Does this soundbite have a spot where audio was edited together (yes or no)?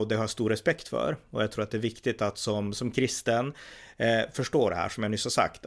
no